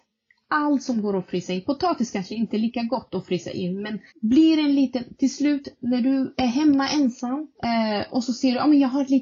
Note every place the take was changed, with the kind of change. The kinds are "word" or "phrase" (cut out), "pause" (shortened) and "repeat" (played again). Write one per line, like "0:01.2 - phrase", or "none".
0:04.1 - pause
0:07.5 - pause